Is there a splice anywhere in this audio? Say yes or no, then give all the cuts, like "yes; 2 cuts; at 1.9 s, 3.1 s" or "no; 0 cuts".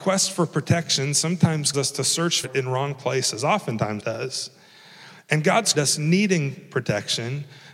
yes; 4 cuts; at 1.7 s, 2.4 s, 4.0 s, 5.7 s